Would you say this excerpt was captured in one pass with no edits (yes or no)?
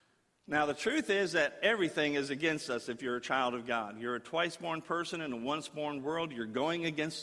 yes